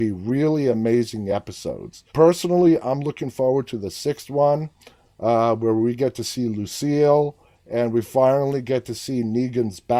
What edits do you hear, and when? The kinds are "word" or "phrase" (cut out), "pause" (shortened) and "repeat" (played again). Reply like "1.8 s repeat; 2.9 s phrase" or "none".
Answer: 2.1 s pause